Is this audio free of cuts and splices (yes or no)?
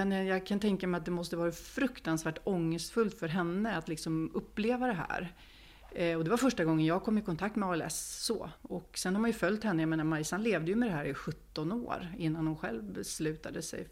no